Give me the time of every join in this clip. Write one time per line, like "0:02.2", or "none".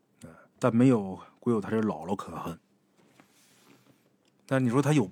none